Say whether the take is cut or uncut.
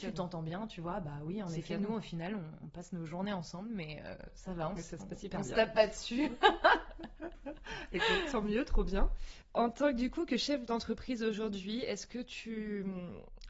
uncut